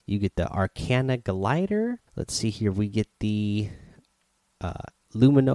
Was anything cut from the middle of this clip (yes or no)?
yes